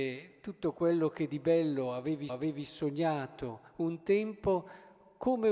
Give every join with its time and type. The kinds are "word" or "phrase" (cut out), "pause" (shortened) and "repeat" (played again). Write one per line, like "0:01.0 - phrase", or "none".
0:02.3 - repeat